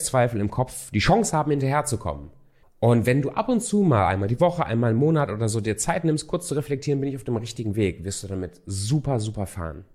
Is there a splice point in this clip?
yes; 1 cut; at 2.6 s

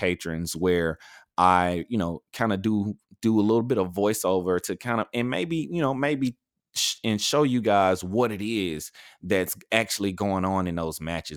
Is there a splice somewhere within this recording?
no; 0 cuts

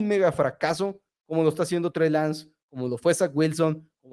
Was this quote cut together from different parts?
no; 0 cuts

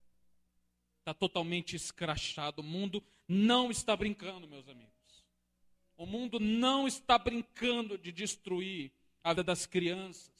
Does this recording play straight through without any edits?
no; 1 cut; at 9.4 s

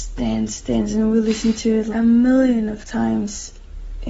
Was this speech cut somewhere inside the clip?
yes; 1 cut; at 1.9 s

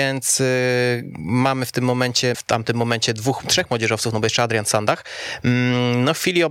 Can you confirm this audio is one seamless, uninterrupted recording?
no; 1 cut; at 2.3 s

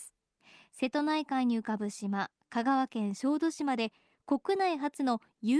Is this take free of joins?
yes; 0 cuts

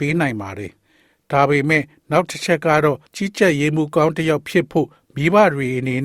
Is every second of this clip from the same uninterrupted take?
no; 1 cut; at 3.1 s

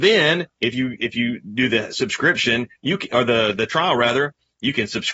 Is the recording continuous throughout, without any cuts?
yes; 0 cuts

